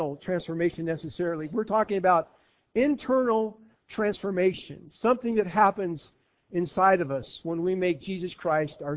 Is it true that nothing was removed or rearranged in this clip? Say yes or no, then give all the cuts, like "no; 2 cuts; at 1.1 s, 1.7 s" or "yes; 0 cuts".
yes; 0 cuts